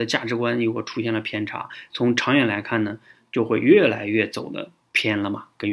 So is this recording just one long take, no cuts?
yes; 0 cuts

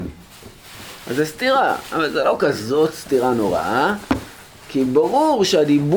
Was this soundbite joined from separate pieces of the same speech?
no; 0 cuts

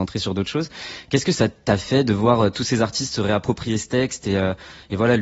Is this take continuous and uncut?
yes; 0 cuts

